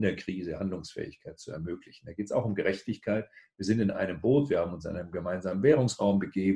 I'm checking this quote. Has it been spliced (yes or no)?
no